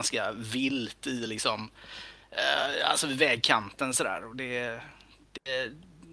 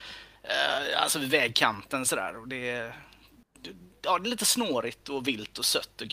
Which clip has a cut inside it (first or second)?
second